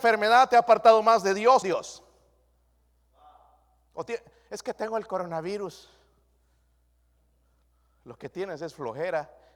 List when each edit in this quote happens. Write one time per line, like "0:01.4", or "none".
0:01.6